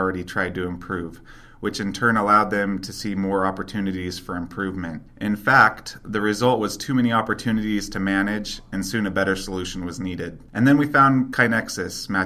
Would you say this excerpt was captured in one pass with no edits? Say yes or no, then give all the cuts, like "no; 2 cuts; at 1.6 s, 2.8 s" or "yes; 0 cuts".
no; 2 cuts; at 5.1 s, 10.5 s